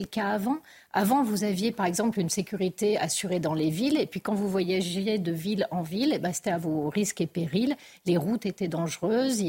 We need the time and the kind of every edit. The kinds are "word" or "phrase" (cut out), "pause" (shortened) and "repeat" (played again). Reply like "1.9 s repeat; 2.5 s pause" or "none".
none

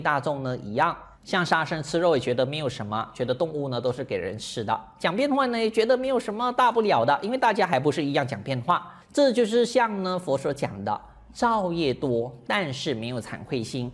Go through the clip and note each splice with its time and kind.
9.0 s pause

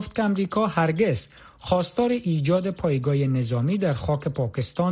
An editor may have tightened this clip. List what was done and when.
none

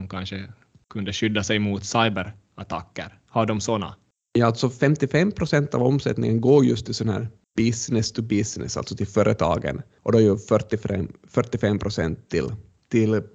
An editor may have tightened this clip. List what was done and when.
none

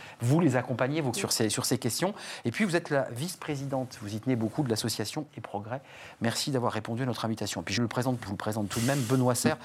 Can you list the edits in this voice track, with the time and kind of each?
1.1 s word; 5.3 s word; 7.8 s word; 8.3 s phrase

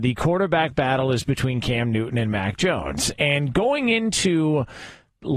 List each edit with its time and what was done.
none

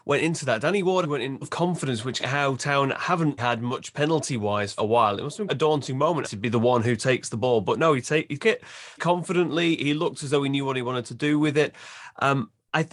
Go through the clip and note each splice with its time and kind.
1.0 s word; 1.4 s word; 2.2 s word; 3.4 s word; 4.8 s word; 5.5 s word; 6.2 s word; 8.4 s word; 9.0 s word

